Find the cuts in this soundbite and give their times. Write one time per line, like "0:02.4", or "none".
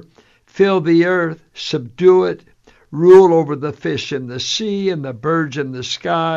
none